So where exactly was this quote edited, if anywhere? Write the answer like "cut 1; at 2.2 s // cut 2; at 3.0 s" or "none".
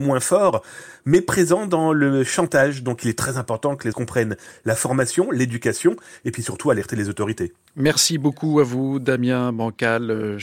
cut 1; at 3.9 s